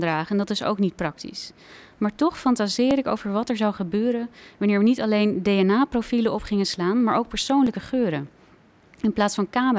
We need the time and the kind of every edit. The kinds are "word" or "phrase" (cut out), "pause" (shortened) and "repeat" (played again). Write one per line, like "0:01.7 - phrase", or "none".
none